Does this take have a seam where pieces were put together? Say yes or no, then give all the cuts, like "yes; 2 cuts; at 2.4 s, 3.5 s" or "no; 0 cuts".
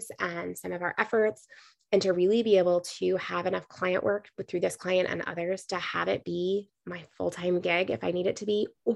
no; 0 cuts